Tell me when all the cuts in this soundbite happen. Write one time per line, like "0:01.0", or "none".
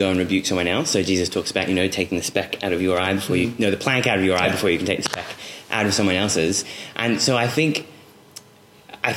none

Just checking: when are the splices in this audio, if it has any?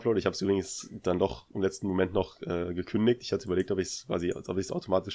none

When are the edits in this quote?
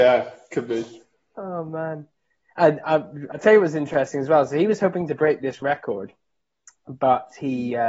none

